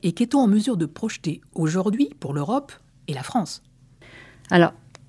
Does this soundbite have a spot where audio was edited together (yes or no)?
no